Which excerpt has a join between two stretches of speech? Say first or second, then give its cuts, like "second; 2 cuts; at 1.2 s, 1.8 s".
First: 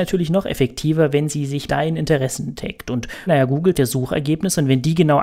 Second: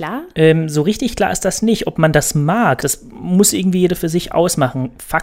first; 3 cuts; at 1.7 s, 3.3 s, 3.7 s